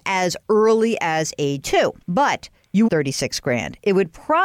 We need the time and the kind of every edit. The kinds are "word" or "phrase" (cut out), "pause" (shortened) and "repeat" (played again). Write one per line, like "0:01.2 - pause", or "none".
0:01.6 - word
0:02.0 - pause
0:02.9 - phrase